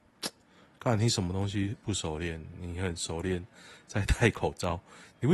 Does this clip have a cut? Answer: no; 0 cuts

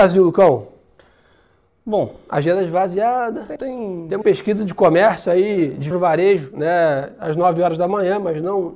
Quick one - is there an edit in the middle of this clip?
yes; 3 cuts; at 3.6 s, 4.2 s, 5.9 s

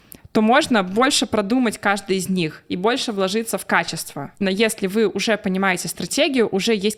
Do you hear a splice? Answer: yes; 1 cut; at 4.4 s

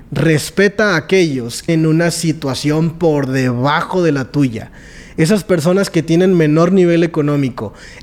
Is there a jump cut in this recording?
yes; 1 cut; at 1.7 s

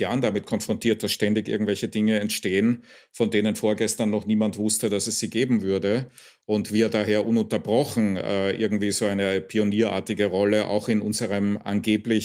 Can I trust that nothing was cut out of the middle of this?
yes; 0 cuts

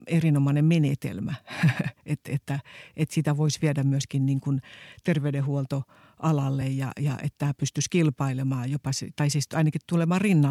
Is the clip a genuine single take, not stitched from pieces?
yes; 0 cuts

